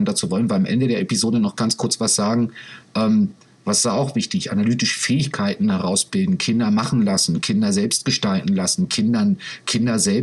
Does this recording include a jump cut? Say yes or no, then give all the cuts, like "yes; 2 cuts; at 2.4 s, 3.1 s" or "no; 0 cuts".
no; 0 cuts